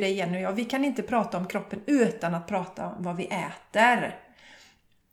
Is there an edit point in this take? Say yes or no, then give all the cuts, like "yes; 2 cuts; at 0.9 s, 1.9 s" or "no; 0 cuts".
no; 0 cuts